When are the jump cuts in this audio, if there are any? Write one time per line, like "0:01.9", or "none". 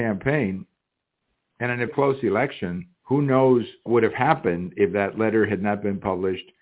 0:01.9
0:02.9
0:03.9